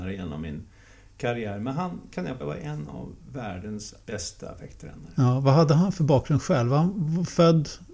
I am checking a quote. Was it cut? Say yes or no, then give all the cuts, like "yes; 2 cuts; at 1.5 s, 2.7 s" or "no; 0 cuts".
yes; 2 cuts; at 2.4 s, 4.0 s